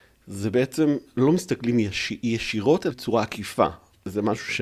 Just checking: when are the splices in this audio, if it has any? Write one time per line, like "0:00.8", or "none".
0:02.9